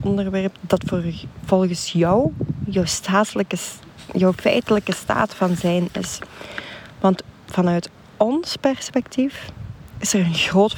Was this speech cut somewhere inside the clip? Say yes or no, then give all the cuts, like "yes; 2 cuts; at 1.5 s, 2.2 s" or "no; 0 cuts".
no; 0 cuts